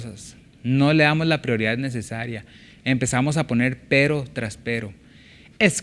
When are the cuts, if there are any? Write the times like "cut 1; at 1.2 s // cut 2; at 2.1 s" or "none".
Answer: none